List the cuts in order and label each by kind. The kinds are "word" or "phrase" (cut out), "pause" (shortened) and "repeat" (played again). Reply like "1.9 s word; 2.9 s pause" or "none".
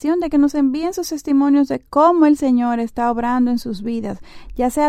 none